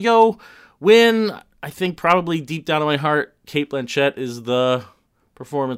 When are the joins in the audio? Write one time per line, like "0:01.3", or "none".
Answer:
none